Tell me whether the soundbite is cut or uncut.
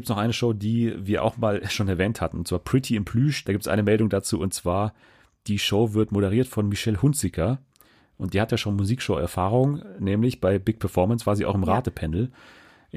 uncut